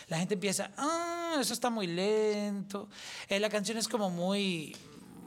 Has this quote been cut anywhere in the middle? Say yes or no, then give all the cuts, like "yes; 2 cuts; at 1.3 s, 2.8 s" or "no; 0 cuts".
no; 0 cuts